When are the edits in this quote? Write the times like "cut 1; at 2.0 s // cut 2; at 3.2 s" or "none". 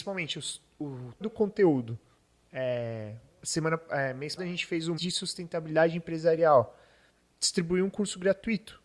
cut 1; at 1.2 s // cut 2; at 3.4 s // cut 3; at 4.4 s // cut 4; at 5.0 s // cut 5; at 7.3 s